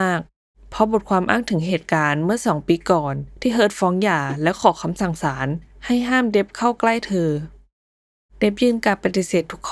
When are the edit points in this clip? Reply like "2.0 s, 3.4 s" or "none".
none